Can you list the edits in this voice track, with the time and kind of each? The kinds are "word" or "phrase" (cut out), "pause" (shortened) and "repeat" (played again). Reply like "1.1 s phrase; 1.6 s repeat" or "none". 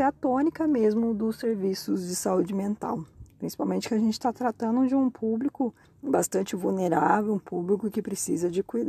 5.8 s pause